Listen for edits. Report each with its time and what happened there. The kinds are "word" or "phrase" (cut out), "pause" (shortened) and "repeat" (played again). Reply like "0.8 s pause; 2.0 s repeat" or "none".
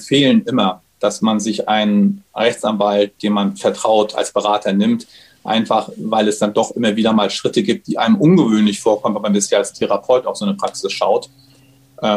none